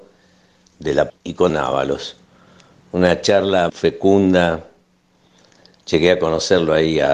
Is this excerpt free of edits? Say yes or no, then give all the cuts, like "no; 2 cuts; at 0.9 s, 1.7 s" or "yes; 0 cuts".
no; 3 cuts; at 1.1 s, 1.5 s, 3.7 s